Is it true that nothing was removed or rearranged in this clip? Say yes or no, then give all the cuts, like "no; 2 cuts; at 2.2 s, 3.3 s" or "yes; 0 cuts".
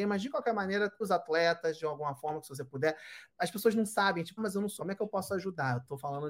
no; 3 cuts; at 1.0 s, 4.4 s, 4.8 s